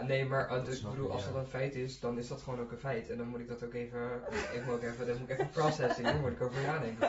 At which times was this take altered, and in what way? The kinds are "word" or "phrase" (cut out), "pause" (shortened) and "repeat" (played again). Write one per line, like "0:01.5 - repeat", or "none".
none